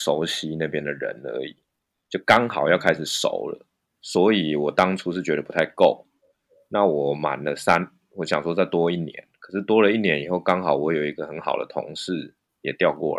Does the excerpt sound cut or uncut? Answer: uncut